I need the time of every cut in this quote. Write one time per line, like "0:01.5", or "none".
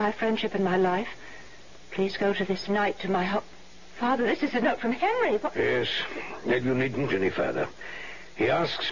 0:02.7
0:07.1